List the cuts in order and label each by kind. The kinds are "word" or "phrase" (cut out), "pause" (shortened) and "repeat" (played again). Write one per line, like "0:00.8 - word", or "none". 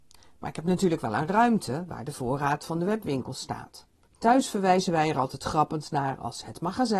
0:04.1 - pause